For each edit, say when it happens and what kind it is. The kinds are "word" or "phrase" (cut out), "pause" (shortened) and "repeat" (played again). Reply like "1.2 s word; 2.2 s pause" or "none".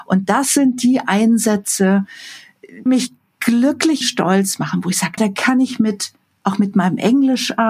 2.9 s word; 4.0 s word; 5.2 s word